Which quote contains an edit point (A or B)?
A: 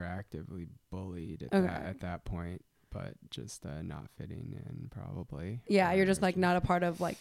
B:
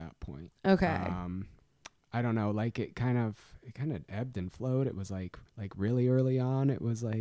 B